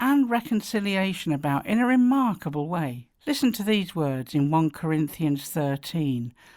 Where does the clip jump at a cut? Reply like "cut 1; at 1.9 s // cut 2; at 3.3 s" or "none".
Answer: cut 1; at 3.2 s